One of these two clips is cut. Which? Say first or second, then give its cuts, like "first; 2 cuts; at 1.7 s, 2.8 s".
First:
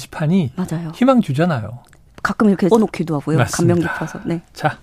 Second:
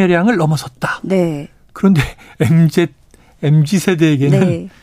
first; 1 cut; at 2.7 s